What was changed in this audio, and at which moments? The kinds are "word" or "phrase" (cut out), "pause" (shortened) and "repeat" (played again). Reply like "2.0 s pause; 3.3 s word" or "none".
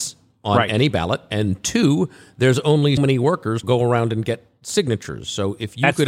3.0 s word; 3.6 s word